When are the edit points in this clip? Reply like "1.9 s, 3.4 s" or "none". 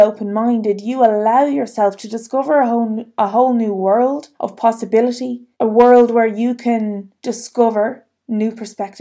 4.3 s, 5.5 s, 7.2 s